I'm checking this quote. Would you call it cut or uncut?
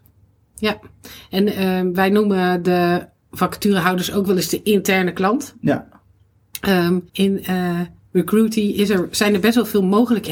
cut